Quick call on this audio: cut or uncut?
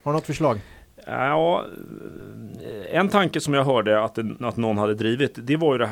uncut